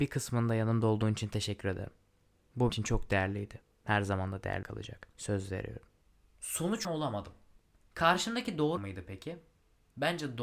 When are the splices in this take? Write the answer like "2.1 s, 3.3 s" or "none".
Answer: 2.7 s, 4.6 s, 5.1 s, 6.8 s, 8.8 s